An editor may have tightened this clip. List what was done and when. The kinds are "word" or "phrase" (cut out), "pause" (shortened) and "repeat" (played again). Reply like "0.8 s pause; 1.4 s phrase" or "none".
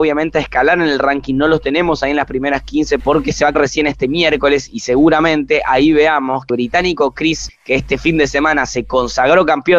3.0 s word; 3.5 s word; 6.5 s word; 7.5 s word